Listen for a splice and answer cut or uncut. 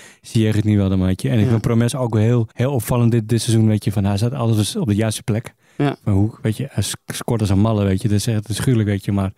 cut